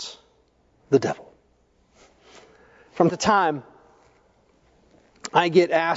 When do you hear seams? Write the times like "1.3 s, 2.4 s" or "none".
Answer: 3.1 s